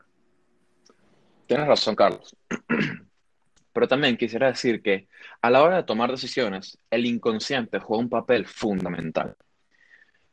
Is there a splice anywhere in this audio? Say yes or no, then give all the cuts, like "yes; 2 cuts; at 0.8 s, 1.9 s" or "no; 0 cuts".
no; 0 cuts